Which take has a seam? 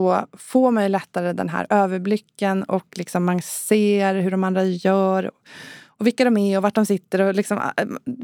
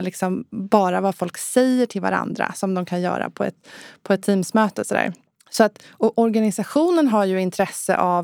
second; 1 cut; at 5.3 s

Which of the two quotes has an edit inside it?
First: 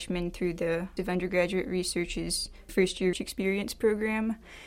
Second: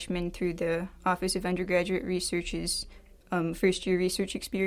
first; 3 cuts; at 1.0 s, 2.7 s, 3.1 s

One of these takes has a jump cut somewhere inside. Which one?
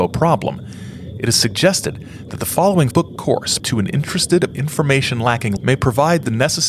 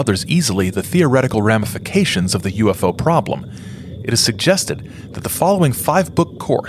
first; 4 cuts; at 2.9 s, 3.6 s, 4.5 s, 5.6 s

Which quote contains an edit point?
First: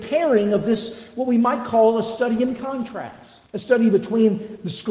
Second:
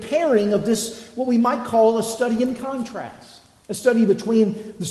first; 1 cut; at 3.5 s

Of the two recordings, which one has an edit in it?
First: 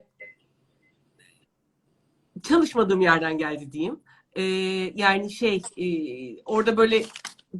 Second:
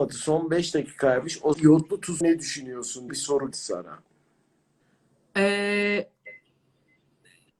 second; 4 cuts; at 1.5 s, 2.2 s, 3.1 s, 3.5 s

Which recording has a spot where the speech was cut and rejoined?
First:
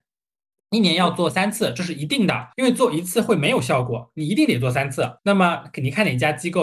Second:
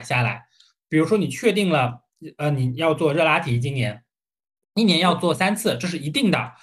first; 2 cuts; at 2.5 s, 5.2 s

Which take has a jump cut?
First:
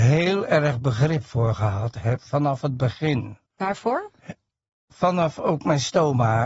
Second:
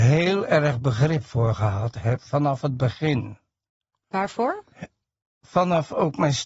first; 1 cut; at 3.5 s

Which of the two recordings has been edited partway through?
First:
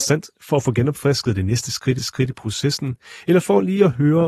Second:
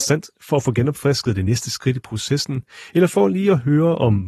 first; 1 cut; at 2.0 s

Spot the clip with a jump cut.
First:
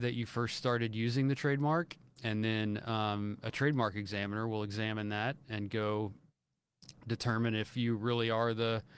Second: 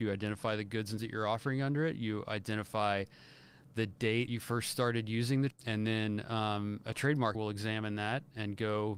second; 4 cuts; at 1.0 s, 4.3 s, 5.5 s, 7.3 s

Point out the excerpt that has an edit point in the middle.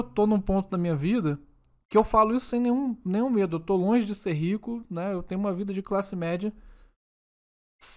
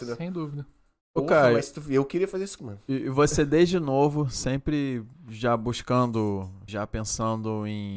second; 2 cuts; at 2.6 s, 6.7 s

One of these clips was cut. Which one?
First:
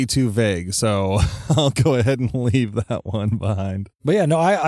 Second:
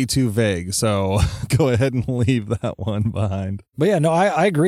second; 1 cut; at 1.4 s

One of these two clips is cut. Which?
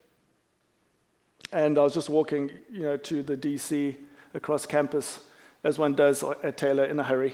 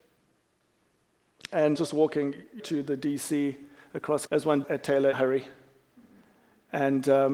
second; 5 cuts; at 1.8 s, 2.6 s, 4.3 s, 4.6 s, 5.1 s

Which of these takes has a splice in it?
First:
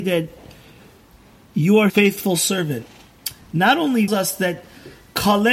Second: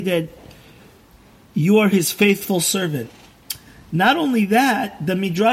first; 3 cuts; at 1.9 s, 3.4 s, 4.1 s

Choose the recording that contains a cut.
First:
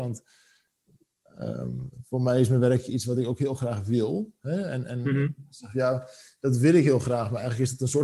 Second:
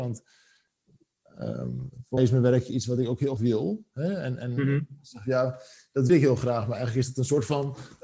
second; 3 cuts; at 2.2 s, 3.4 s, 6.1 s

